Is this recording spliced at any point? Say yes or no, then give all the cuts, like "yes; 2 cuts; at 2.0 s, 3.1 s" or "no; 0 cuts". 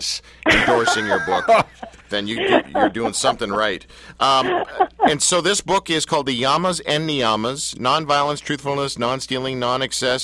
yes; 1 cut; at 2.0 s